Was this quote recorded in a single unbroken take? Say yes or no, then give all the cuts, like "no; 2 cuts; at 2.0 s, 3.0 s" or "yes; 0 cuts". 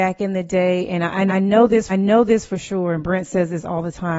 no; 2 cuts; at 1.3 s, 1.9 s